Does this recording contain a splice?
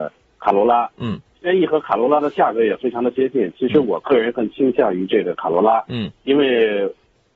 no; 0 cuts

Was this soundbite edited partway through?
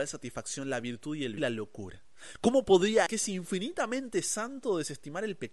yes; 2 cuts; at 1.4 s, 3.1 s

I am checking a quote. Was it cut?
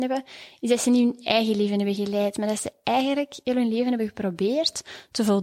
no; 0 cuts

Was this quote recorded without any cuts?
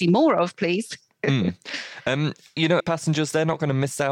no; 1 cut; at 2.8 s

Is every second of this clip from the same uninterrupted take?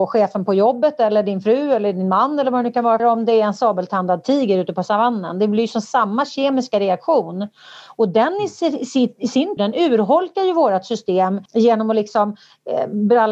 no; 3 cuts; at 3.0 s, 9.6 s, 11.5 s

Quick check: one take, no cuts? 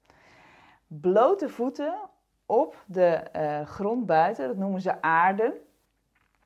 yes; 0 cuts

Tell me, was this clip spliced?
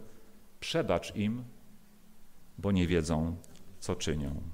no; 0 cuts

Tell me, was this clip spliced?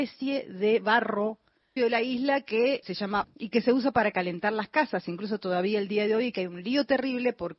yes; 3 cuts; at 1.8 s, 2.8 s, 3.2 s

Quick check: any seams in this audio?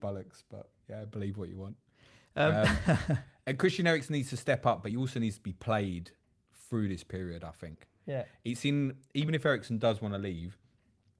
no; 0 cuts

